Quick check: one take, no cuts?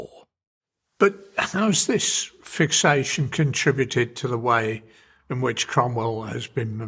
yes; 0 cuts

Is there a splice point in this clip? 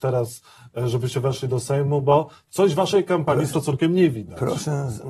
yes; 1 cut; at 3.5 s

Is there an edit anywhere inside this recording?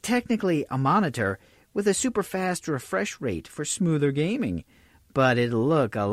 no; 0 cuts

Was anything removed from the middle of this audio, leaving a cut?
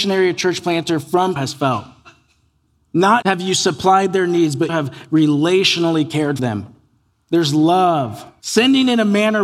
yes; 5 cuts; at 1.4 s, 3.2 s, 4.7 s, 6.4 s, 8.4 s

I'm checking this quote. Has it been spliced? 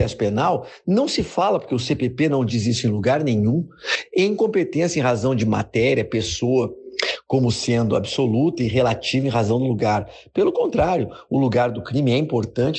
no; 0 cuts

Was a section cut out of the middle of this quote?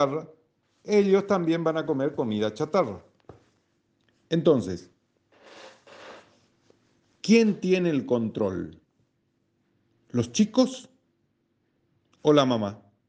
no; 0 cuts

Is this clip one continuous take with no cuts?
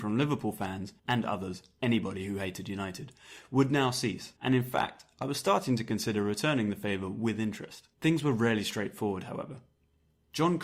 no; 3 cuts; at 1.0 s, 4.4 s, 7.9 s

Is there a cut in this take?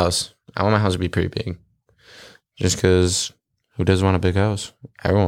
no; 0 cuts

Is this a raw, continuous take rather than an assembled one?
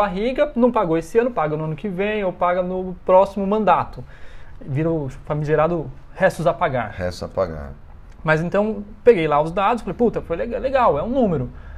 yes; 0 cuts

